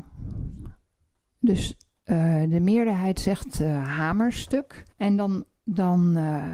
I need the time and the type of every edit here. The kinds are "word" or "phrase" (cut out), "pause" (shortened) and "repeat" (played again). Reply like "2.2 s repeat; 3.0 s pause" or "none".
4.9 s pause